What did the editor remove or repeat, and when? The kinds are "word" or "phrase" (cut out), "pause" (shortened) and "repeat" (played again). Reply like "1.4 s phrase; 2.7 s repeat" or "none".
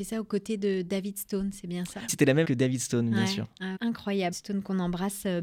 2.1 s word; 2.4 s word; 3.8 s word; 4.3 s word